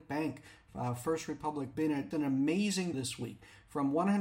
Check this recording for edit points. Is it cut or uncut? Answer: cut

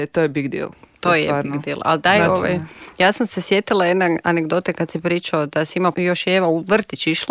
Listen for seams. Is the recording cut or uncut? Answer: cut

